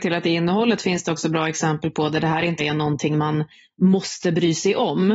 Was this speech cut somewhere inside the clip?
yes; 1 cut; at 2.6 s

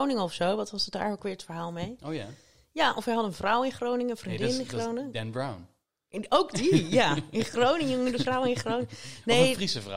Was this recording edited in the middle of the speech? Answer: no; 0 cuts

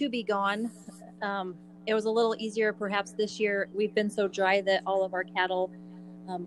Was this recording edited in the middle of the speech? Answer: no; 0 cuts

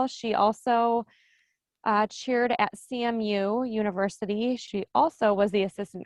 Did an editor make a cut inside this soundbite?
no; 0 cuts

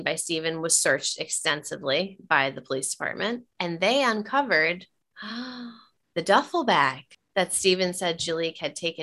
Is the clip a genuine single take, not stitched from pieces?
yes; 0 cuts

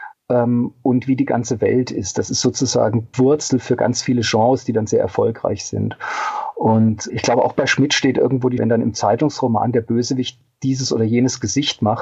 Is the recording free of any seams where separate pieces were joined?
no; 3 cuts; at 3.1 s, 7.1 s, 8.6 s

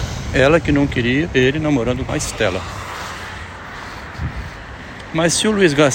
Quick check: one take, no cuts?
no; 1 cut; at 2.1 s

